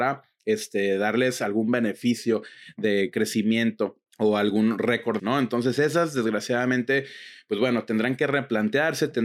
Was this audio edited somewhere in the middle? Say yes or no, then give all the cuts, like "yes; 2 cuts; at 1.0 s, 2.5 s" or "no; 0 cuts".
yes; 2 cuts; at 4.1 s, 5.2 s